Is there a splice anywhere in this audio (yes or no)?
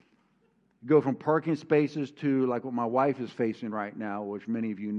no